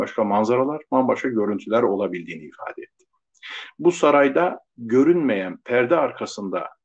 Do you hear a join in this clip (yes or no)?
no